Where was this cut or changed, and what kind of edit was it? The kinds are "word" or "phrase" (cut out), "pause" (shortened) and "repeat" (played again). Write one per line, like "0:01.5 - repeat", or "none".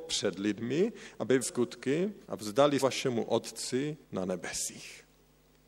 0:01.4 - phrase
0:02.2 - pause
0:02.8 - word
0:04.0 - pause